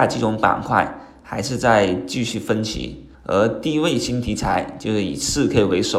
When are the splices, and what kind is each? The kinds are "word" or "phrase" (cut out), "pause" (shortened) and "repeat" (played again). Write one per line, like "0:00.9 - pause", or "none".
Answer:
0:03.1 - pause